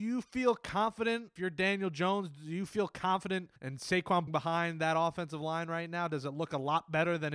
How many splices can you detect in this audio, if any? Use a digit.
1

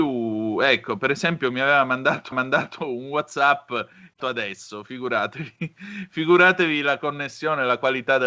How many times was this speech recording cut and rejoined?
2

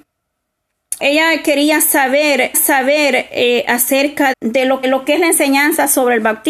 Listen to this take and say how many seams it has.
4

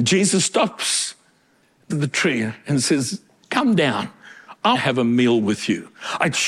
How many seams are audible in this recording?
3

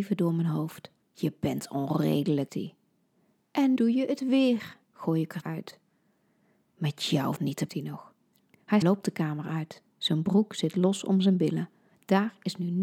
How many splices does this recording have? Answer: 9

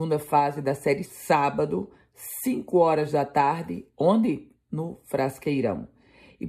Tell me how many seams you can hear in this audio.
1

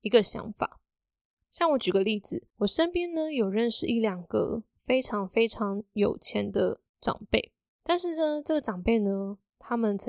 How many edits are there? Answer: 4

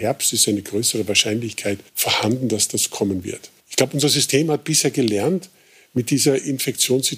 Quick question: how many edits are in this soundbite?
2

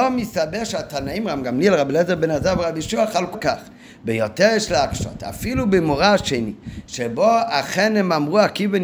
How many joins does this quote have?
1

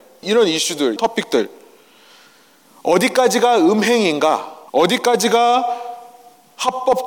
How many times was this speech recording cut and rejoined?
2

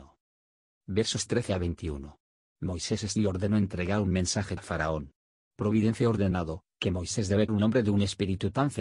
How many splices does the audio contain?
3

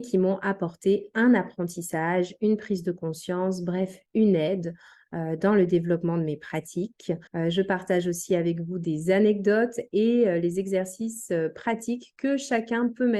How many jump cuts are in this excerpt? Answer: 1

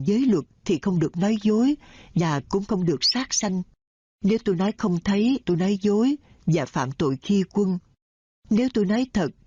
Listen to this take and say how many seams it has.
1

